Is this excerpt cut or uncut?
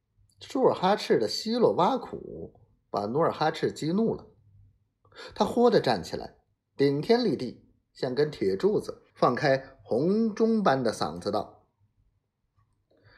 cut